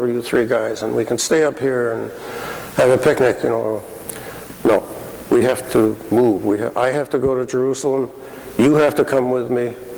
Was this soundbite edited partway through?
no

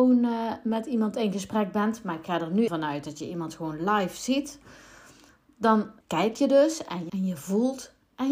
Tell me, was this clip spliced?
yes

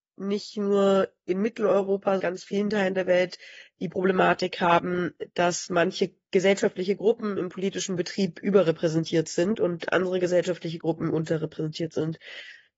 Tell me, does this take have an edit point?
yes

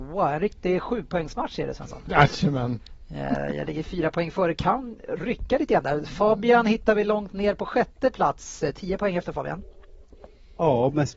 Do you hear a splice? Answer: no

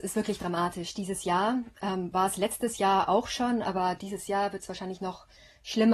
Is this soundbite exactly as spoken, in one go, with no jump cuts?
yes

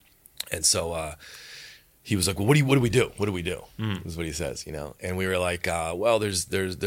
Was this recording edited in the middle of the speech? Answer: no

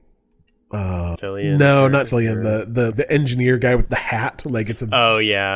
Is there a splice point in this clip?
yes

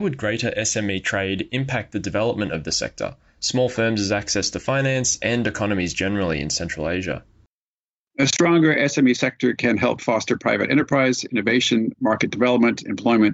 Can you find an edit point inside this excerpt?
no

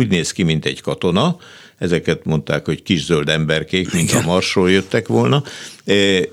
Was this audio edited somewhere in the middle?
no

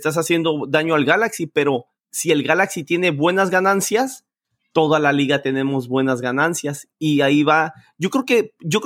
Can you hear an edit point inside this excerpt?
no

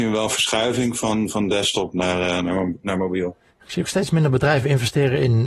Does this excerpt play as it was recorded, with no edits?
yes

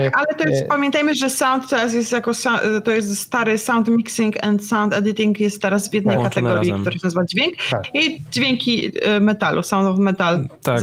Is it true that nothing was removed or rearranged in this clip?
yes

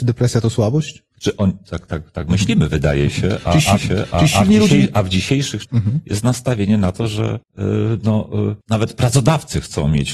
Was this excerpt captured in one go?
no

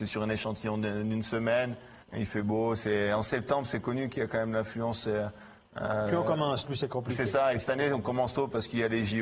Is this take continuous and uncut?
no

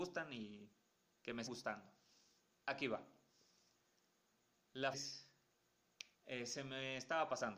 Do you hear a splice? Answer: yes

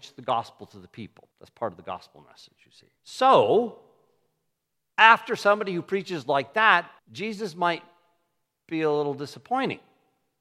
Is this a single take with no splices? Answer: no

